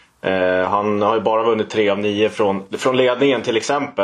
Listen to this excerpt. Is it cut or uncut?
uncut